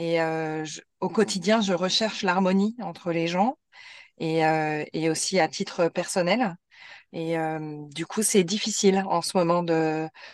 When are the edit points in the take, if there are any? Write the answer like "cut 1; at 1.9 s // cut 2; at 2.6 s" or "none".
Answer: none